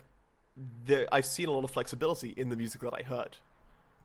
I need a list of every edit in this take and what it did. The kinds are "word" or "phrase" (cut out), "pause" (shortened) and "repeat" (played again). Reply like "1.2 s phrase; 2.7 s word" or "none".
none